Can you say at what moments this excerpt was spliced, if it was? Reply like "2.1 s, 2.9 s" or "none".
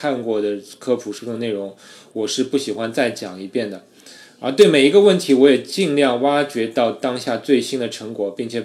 none